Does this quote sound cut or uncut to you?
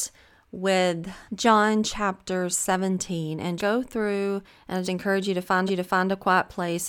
cut